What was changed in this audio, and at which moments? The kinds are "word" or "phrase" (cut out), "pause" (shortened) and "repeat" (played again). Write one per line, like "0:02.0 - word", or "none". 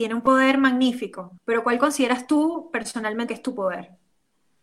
0:01.4 - pause
0:03.3 - word